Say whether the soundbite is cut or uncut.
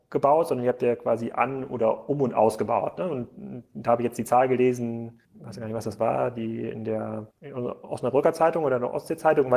cut